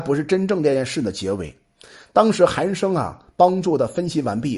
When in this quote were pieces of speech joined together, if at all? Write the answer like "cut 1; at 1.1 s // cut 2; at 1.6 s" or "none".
none